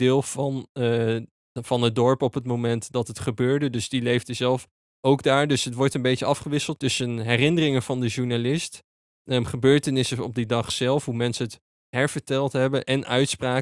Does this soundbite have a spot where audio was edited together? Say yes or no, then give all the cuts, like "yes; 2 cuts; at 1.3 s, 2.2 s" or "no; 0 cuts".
no; 0 cuts